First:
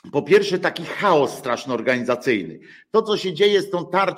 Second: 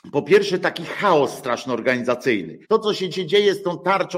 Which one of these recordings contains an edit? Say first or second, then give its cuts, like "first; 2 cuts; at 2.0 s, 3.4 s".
second; 2 cuts; at 2.6 s, 3.1 s